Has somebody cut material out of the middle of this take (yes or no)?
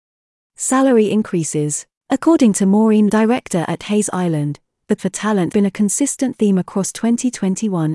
yes